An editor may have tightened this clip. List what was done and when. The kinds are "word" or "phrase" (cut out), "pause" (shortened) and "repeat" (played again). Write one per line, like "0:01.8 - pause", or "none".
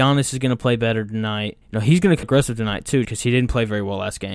0:01.6 - pause
0:02.2 - word
0:03.0 - word